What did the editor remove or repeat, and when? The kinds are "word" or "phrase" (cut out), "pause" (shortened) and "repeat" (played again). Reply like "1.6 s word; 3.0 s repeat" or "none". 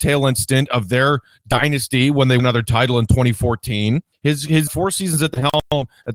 2.4 s word; 4.1 s pause; 4.7 s word